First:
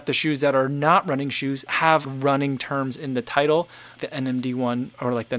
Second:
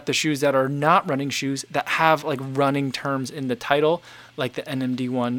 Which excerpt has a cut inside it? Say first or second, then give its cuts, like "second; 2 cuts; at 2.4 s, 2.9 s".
first; 3 cuts; at 1.7 s, 2.0 s, 4.0 s